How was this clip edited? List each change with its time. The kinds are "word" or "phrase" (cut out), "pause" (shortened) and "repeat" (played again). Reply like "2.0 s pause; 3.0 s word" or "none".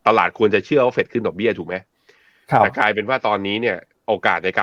none